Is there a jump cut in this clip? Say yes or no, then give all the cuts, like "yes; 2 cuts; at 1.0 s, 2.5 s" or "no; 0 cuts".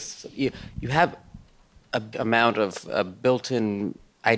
yes; 1 cut; at 2.1 s